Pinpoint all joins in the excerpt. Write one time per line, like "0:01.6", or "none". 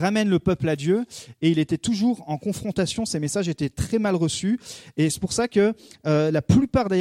none